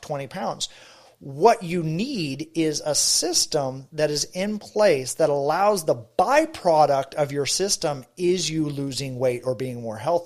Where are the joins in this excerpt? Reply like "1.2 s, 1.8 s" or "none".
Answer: none